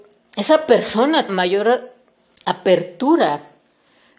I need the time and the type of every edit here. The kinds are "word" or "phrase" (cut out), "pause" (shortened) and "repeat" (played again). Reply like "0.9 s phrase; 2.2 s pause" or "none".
1.3 s word